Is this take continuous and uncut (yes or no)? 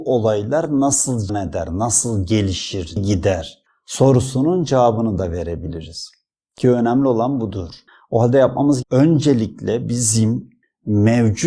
no